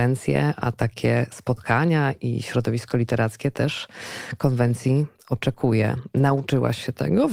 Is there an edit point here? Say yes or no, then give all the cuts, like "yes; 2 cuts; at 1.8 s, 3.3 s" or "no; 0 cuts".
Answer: no; 0 cuts